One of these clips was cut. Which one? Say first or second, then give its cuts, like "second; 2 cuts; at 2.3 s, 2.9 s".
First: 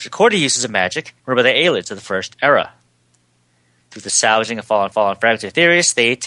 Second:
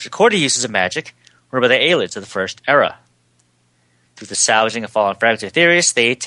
first; 2 cuts; at 1.2 s, 4.9 s